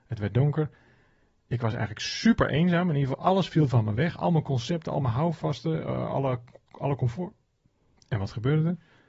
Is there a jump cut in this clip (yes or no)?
no